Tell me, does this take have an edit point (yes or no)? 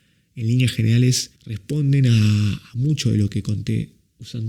yes